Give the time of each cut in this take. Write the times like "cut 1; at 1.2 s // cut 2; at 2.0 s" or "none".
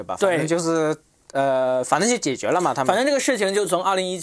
none